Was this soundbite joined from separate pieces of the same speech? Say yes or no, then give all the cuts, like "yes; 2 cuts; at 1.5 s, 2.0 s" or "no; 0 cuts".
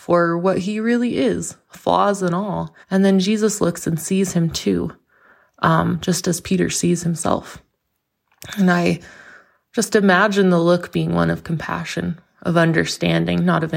yes; 1 cut; at 2.8 s